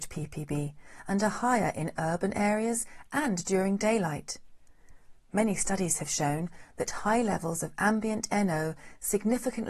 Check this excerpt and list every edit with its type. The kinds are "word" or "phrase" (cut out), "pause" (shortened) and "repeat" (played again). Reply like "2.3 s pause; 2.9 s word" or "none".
none